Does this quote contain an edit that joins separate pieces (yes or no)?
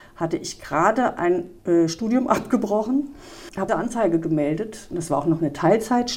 yes